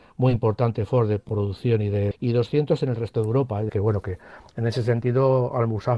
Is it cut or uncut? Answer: cut